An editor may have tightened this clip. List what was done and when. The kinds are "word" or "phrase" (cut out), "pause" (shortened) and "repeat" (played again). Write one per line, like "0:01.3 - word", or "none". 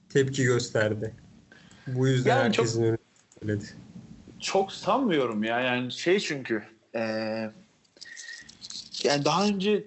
none